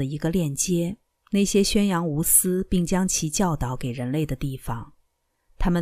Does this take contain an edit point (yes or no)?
yes